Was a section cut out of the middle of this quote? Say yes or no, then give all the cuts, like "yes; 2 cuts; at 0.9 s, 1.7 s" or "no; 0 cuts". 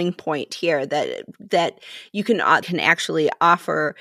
yes; 1 cut; at 2.6 s